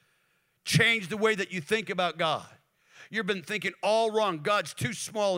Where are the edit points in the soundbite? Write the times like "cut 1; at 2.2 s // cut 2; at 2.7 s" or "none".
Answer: none